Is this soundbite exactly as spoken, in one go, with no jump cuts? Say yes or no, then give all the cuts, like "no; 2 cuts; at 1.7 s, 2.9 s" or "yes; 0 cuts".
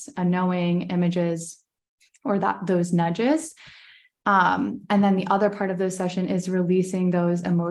yes; 0 cuts